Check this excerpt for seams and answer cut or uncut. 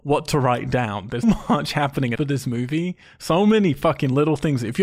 cut